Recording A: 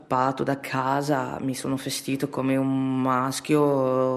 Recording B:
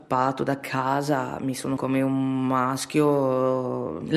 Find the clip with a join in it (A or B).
B